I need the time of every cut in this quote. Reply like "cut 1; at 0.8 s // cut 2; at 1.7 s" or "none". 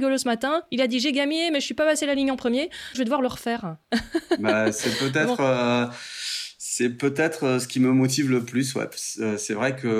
cut 1; at 2.9 s